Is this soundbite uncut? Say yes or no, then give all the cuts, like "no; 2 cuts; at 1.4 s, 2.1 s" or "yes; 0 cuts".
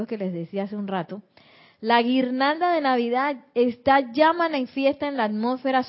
yes; 0 cuts